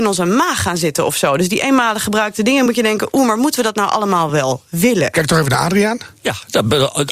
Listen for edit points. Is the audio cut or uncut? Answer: uncut